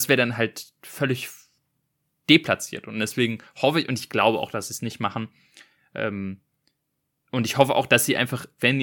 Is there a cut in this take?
no; 0 cuts

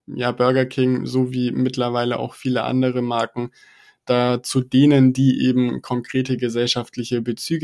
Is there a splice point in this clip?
no; 0 cuts

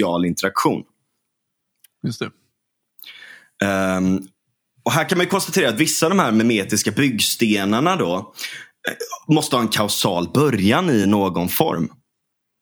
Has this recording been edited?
no; 0 cuts

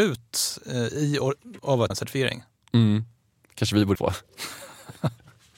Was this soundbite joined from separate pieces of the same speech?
yes; 3 cuts; at 1.6 s, 1.9 s, 3.9 s

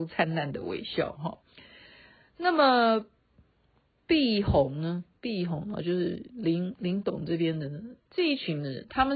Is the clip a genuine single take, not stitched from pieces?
yes; 0 cuts

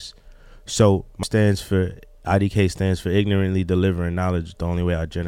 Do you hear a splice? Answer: yes; 1 cut; at 1.2 s

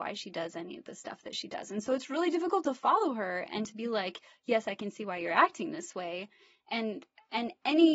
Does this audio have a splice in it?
no; 0 cuts

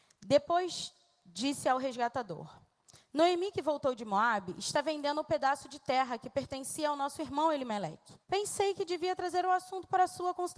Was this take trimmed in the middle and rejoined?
yes; 1 cut; at 8.2 s

